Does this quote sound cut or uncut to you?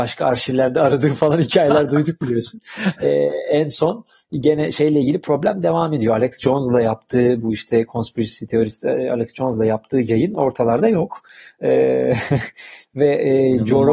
uncut